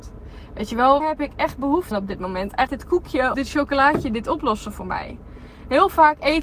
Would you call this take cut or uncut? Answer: cut